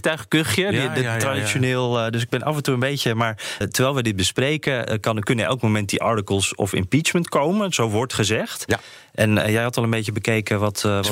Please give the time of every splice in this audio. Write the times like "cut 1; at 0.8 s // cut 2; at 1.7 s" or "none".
cut 1; at 3.6 s